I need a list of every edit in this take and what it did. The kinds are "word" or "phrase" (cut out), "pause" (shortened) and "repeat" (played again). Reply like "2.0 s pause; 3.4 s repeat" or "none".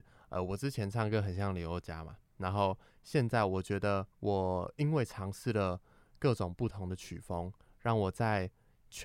4.1 s pause